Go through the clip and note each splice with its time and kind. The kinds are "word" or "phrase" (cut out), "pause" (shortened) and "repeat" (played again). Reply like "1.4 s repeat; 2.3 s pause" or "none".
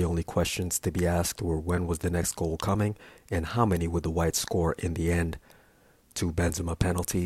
none

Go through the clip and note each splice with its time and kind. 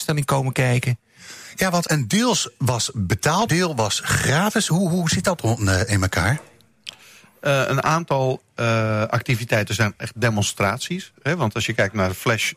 1.9 s word; 3.5 s word

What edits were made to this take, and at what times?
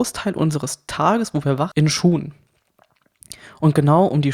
1.7 s word

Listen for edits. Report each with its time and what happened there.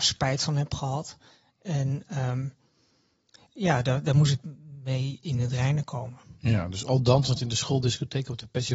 none

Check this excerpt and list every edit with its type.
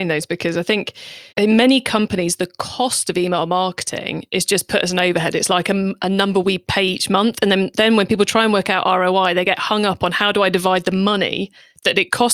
1.3 s pause

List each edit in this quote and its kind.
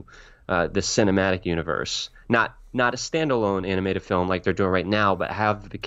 none

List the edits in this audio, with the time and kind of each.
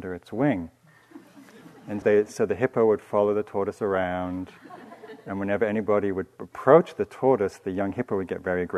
2.0 s word

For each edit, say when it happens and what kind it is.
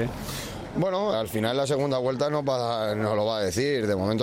1.1 s word

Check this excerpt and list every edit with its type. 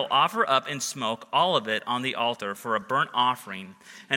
none

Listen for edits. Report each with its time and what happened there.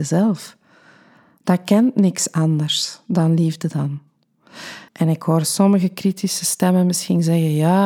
4.9 s pause

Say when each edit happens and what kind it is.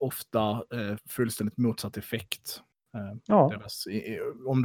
1.0 s word

